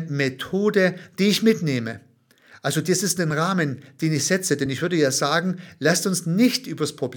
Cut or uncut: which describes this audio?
uncut